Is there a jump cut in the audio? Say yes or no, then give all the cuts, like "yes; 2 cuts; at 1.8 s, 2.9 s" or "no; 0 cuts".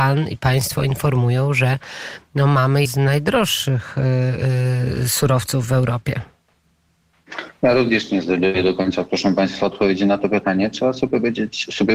yes; 1 cut; at 2.8 s